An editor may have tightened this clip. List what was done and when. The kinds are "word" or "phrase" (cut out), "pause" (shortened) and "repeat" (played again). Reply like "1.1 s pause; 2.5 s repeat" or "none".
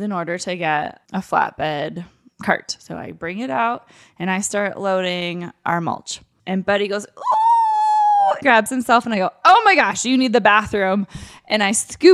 8.4 s word